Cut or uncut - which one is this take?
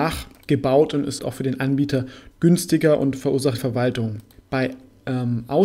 cut